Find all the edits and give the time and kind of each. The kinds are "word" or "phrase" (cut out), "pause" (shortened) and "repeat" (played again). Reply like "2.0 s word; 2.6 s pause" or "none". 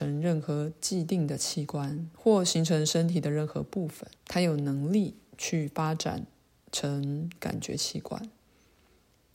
2.1 s pause; 4.2 s pause